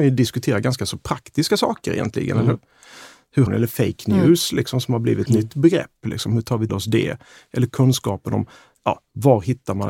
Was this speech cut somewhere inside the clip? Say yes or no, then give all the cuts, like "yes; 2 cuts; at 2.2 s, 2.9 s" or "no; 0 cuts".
yes; 3 cuts; at 3.5 s, 5.3 s, 6.7 s